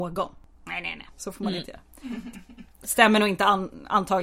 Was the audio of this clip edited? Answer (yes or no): no